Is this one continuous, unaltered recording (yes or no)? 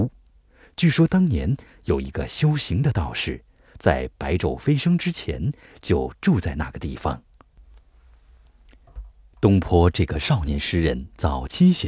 yes